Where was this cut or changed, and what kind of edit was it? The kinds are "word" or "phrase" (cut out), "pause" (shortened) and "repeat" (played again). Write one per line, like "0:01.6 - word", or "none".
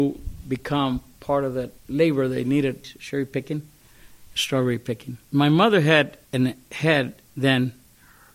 0:01.8 - pause
0:05.2 - pause
0:06.3 - pause
0:07.3 - pause

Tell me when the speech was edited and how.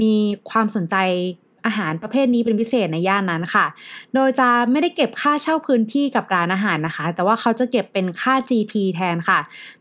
none

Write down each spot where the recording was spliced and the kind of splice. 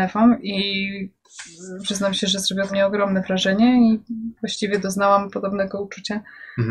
0:02.7 - word
0:04.4 - pause

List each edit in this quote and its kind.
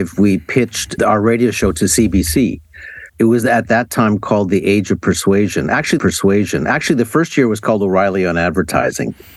0:01.0 - word
0:03.1 - pause
0:06.0 - repeat

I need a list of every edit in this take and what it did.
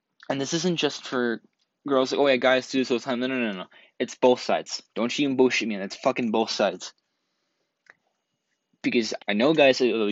0:04.9 - pause
0:09.2 - word

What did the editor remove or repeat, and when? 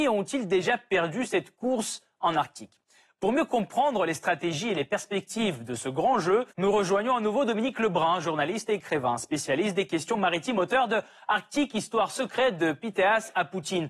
0:06.5 - pause

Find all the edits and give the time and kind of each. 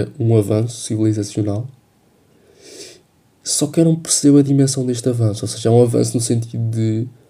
none

